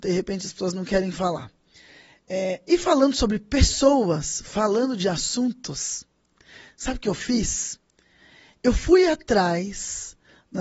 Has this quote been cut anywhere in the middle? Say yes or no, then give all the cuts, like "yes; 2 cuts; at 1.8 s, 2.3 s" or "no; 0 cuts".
no; 0 cuts